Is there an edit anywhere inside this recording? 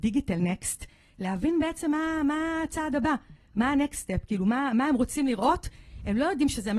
no; 0 cuts

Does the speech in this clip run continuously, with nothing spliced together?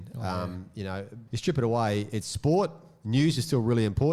no; 1 cut; at 1.3 s

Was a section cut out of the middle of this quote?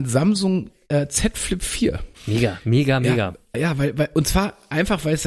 yes; 2 cuts; at 2.1 s, 3.5 s

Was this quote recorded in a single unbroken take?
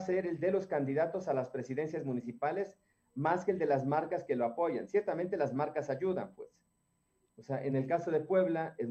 yes; 0 cuts

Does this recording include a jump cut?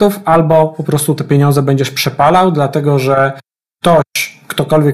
no; 0 cuts

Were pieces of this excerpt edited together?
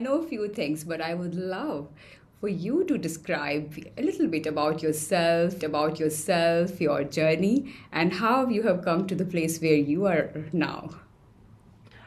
yes; 1 cut; at 5.6 s

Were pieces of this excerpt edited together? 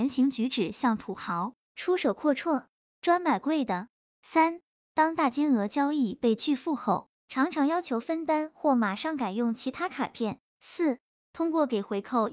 no; 0 cuts

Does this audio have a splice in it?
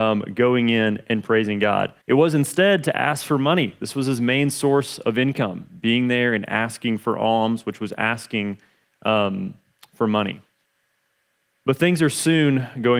yes; 1 cut; at 2.0 s

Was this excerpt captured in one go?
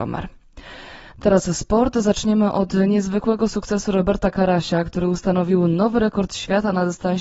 yes; 0 cuts

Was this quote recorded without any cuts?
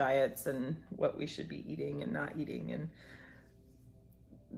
yes; 0 cuts

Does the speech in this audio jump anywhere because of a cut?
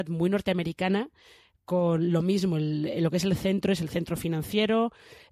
no; 0 cuts

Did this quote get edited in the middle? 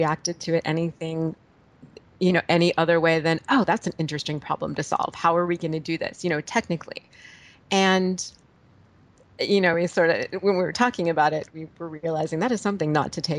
no; 0 cuts

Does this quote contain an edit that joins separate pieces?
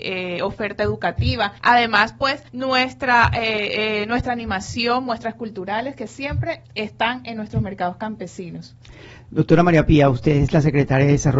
yes; 3 cuts; at 1.6 s, 2.5 s, 6.6 s

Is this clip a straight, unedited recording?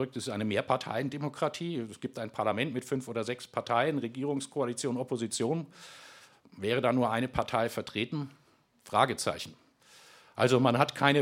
yes; 0 cuts

